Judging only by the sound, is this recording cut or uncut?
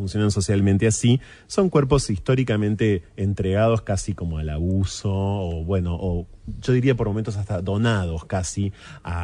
uncut